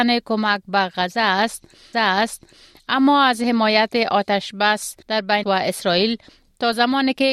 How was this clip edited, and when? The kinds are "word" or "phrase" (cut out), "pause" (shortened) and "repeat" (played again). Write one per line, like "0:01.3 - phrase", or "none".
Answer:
0:01.9 - repeat
0:05.0 - pause
0:05.4 - word